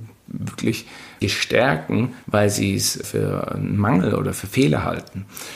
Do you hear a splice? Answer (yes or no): yes